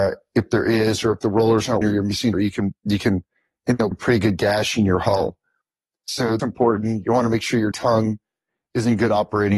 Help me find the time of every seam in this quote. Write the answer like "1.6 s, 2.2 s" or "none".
1.8 s, 2.3 s, 3.9 s, 6.4 s, 7.7 s